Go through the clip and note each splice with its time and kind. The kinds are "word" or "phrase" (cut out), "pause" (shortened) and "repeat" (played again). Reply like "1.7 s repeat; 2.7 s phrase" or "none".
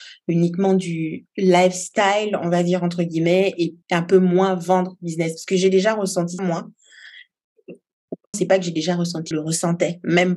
3.8 s pause; 6.4 s word; 8.3 s word; 9.3 s word